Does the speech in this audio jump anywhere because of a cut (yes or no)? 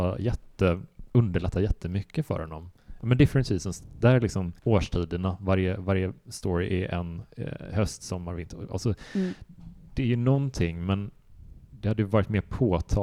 yes